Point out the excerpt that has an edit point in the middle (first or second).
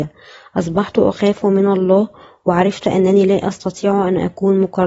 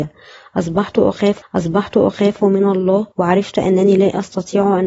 second